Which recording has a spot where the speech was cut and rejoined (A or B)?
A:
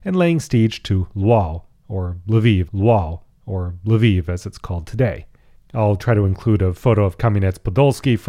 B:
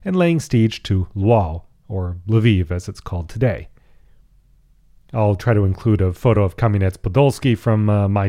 A